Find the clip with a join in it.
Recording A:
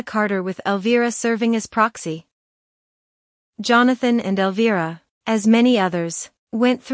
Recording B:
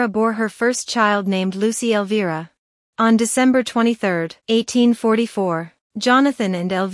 B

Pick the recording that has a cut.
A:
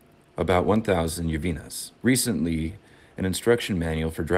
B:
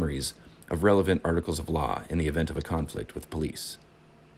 A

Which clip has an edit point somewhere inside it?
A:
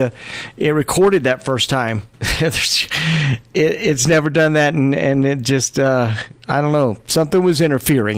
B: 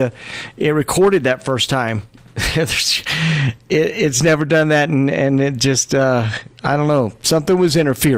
A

